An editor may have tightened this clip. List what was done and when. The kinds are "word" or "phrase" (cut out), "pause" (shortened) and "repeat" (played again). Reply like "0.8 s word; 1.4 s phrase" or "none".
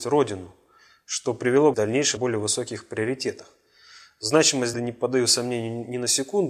1.7 s phrase; 2.2 s word; 4.7 s phrase